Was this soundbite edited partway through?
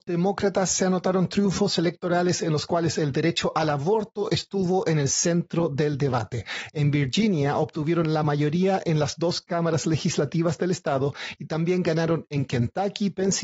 no; 0 cuts

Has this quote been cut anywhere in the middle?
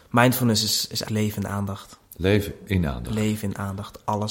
yes; 2 cuts; at 1.1 s, 2.0 s

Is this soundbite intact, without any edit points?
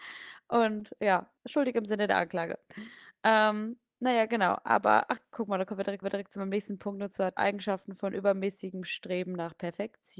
no; 3 cuts; at 1.4 s, 6.0 s, 7.4 s

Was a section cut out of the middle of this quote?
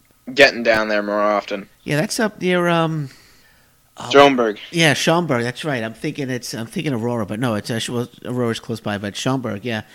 yes; 1 cut; at 1.7 s

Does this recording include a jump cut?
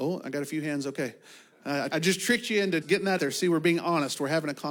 yes; 3 cuts; at 1.9 s, 2.8 s, 3.2 s

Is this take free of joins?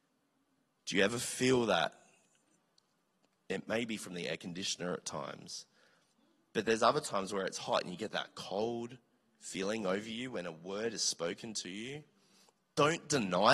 yes; 0 cuts

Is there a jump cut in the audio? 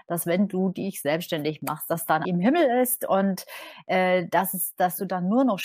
yes; 1 cut; at 2.2 s

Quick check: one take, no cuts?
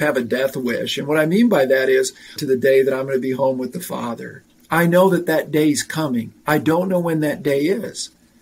no; 3 cuts; at 2.4 s, 4.5 s, 6.4 s

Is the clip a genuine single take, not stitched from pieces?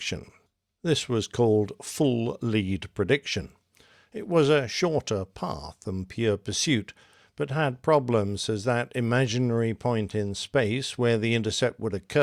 yes; 0 cuts

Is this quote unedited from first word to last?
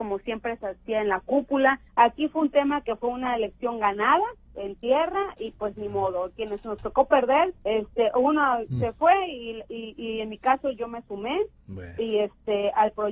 no; 2 cuts; at 1.9 s, 7.6 s

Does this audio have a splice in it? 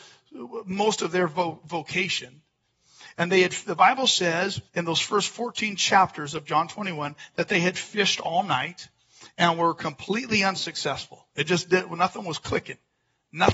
yes; 1 cut; at 4.7 s

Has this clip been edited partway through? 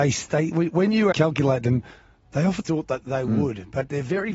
yes; 2 cuts; at 1.1 s, 2.6 s

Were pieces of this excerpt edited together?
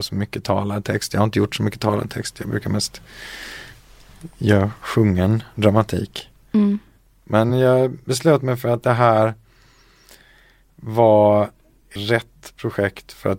no; 0 cuts

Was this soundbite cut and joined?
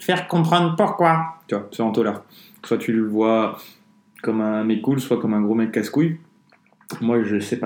no; 0 cuts

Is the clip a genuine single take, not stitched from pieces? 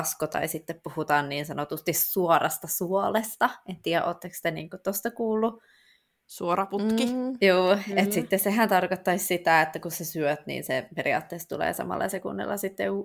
yes; 0 cuts

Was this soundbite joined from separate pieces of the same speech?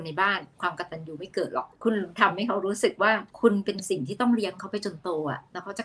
yes; 2 cuts; at 1.8 s, 3.3 s

